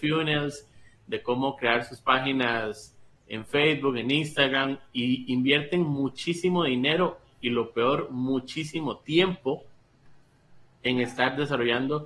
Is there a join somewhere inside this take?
no; 0 cuts

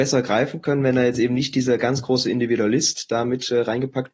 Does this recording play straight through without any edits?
yes; 0 cuts

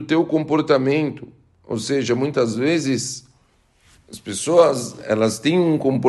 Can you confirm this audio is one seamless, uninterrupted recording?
yes; 0 cuts

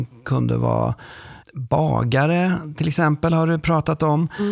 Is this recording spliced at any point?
no; 0 cuts

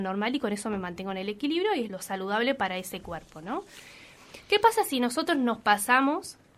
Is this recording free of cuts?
no; 1 cut; at 1.9 s

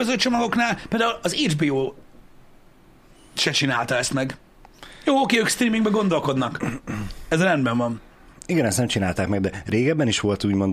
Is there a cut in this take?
no; 0 cuts

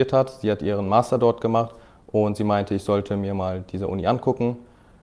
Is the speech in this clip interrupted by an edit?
no; 0 cuts

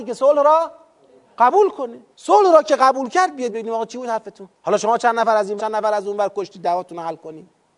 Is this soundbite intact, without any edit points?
no; 4 cuts; at 2.1 s, 3.5 s, 4.5 s, 5.6 s

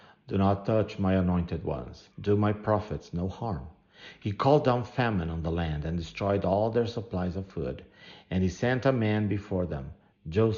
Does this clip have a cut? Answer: yes; 1 cut; at 2.1 s

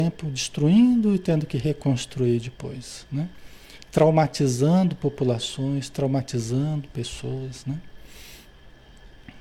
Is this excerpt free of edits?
yes; 0 cuts

